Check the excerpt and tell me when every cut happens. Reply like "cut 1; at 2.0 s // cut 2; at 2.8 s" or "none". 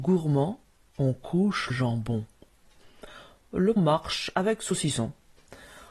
cut 1; at 1.7 s // cut 2; at 3.8 s